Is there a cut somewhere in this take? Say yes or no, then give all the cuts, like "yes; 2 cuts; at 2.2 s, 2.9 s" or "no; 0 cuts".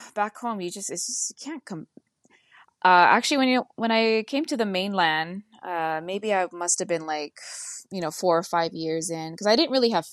no; 0 cuts